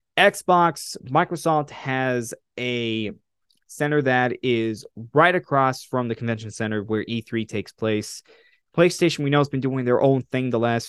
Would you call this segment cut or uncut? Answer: uncut